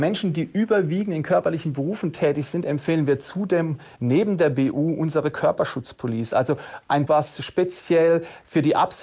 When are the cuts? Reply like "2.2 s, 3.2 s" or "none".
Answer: 7.1 s

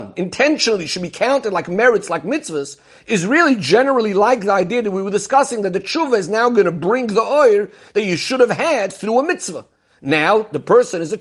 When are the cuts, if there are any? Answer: none

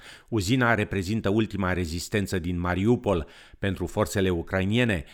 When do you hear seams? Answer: none

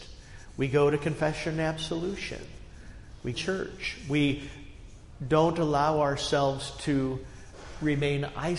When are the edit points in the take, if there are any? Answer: 3.3 s

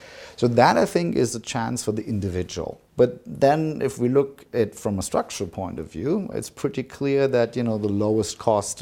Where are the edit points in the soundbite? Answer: 2.9 s, 6.3 s

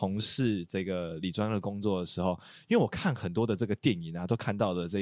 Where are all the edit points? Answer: none

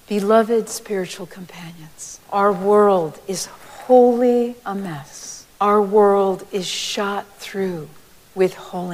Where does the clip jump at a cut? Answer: 2.2 s, 4.6 s, 5.5 s

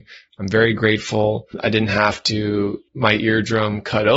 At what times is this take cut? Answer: 2.9 s

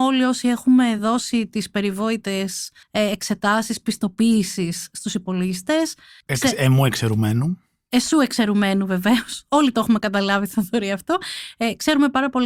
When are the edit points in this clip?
none

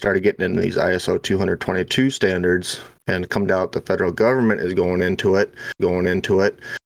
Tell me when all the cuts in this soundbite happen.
3.5 s, 5.8 s

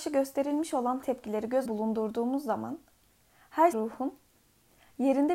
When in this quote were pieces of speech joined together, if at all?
1.0 s, 1.6 s, 3.7 s

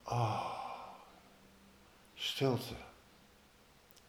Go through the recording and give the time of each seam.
none

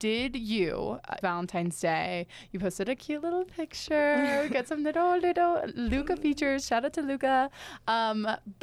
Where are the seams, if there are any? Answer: 1.2 s

